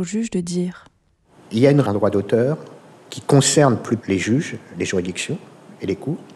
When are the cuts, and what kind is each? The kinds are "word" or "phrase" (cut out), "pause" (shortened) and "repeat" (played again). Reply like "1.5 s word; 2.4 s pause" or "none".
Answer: 1.8 s word; 2.9 s pause; 4.0 s word